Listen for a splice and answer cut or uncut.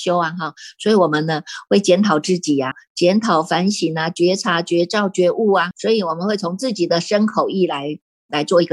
cut